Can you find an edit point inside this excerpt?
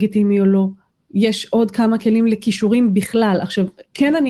no; 0 cuts

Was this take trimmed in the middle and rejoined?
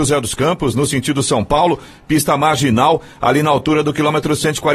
no; 0 cuts

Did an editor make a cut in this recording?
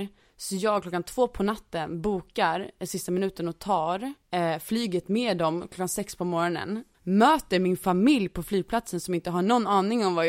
yes; 2 cuts; at 4.2 s, 6.9 s

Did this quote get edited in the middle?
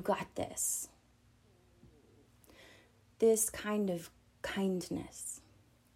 no; 0 cuts

